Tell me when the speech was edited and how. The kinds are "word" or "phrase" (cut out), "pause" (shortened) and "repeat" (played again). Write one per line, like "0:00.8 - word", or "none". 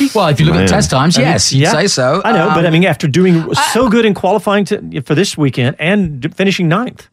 none